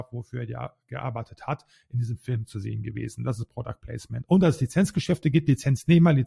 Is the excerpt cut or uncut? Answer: uncut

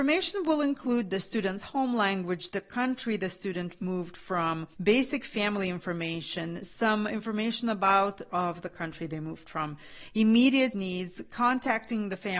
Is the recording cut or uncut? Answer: cut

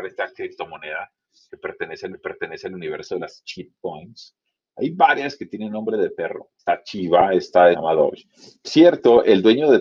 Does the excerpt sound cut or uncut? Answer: cut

